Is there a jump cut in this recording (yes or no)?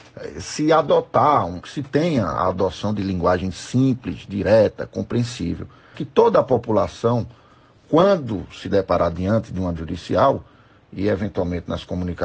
yes